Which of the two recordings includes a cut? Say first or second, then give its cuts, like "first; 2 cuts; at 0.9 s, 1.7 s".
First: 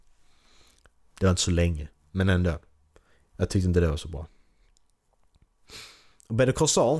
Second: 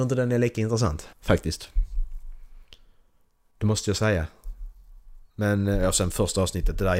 second; 2 cuts; at 1.1 s, 5.3 s